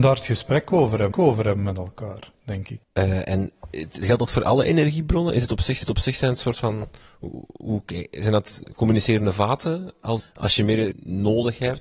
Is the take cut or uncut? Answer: cut